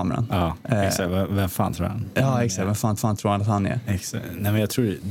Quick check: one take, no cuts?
no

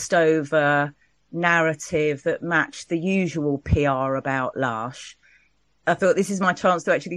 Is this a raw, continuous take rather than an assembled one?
yes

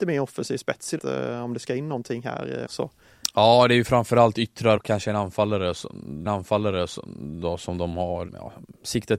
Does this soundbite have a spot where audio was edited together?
yes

